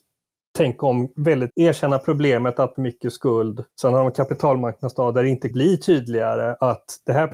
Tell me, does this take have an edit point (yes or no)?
yes